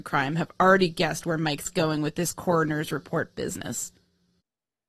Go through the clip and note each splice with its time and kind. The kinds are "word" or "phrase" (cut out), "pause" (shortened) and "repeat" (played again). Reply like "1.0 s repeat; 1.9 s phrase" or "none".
none